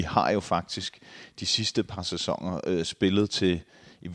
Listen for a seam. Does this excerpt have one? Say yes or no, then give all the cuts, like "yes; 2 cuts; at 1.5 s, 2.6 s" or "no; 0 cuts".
no; 0 cuts